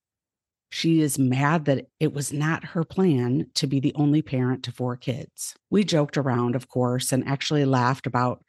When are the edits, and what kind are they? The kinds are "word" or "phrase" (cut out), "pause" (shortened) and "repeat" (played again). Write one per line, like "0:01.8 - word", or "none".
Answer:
0:01.9 - pause
0:05.6 - pause